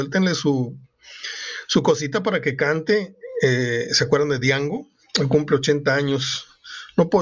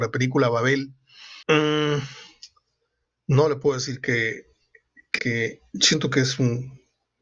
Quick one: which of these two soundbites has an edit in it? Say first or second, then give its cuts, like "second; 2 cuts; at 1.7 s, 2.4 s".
second; 2 cuts; at 1.4 s, 5.2 s